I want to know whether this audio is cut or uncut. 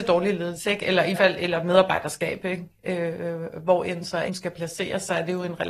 cut